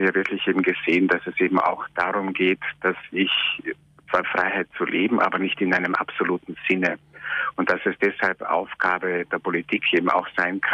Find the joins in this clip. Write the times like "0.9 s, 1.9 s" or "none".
4.2 s